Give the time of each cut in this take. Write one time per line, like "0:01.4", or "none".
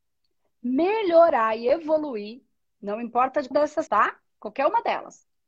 0:03.5
0:03.9